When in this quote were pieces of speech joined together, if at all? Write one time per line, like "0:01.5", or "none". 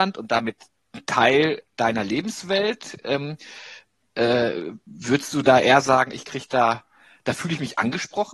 none